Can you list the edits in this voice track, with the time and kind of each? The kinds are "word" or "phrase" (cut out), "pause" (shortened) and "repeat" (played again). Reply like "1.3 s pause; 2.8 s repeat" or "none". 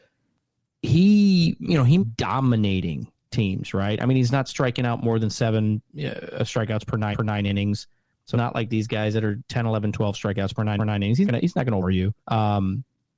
2.0 s phrase; 5.9 s pause; 7.1 s repeat; 8.3 s word; 10.8 s repeat; 11.3 s word; 11.8 s word; 12.2 s pause

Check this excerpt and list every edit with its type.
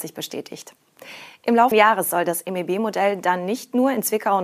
1.7 s phrase

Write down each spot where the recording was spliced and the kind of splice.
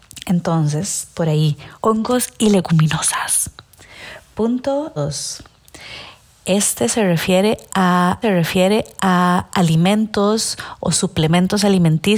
1.7 s pause; 5.0 s word; 8.2 s repeat

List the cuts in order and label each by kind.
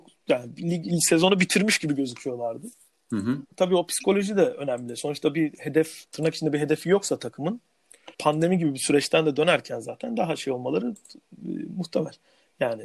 3.5 s pause; 6.1 s pause; 8.1 s pause

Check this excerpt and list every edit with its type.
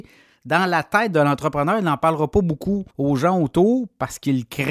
2.9 s pause

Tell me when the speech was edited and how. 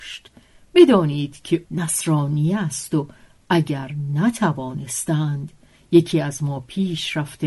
1.6 s word

